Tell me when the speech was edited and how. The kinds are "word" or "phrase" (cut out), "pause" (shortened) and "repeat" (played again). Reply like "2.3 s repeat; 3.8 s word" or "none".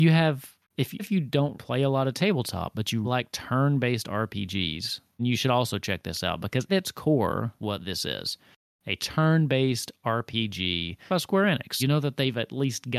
1.0 s word; 1.5 s word; 3.0 s word; 5.2 s word; 6.7 s word; 7.6 s word; 11.1 s word; 11.8 s word